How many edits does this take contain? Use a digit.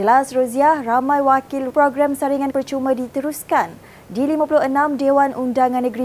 2